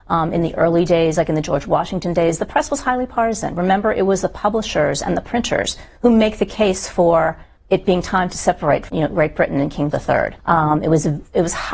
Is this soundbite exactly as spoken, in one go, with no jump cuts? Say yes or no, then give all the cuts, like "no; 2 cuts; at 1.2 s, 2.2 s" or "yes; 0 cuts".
no; 4 cuts; at 7.6 s, 8.9 s, 9.9 s, 10.4 s